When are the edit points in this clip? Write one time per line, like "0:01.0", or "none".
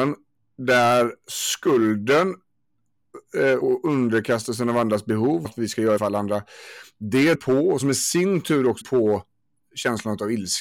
0:03.6
0:05.4
0:06.0
0:07.3
0:07.8
0:08.8